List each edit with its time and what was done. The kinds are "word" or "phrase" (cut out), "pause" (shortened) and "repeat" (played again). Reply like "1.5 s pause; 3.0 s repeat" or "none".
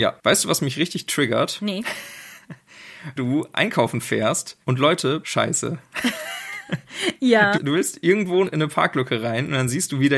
3.2 s word; 4.6 s pause; 5.2 s word; 7.5 s word; 8.4 s word